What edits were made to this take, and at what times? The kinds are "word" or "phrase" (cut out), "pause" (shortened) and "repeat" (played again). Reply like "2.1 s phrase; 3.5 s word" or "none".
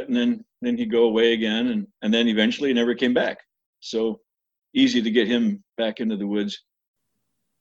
1.9 s pause; 5.7 s pause